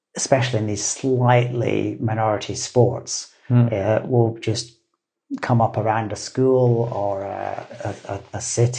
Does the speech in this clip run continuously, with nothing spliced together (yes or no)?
yes